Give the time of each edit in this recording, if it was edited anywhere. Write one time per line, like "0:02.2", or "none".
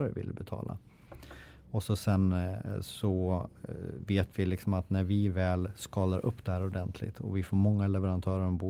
none